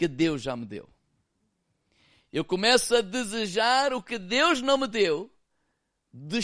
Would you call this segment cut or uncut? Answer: uncut